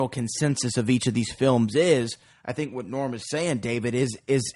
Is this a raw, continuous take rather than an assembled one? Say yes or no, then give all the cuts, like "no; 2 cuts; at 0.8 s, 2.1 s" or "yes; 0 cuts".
yes; 0 cuts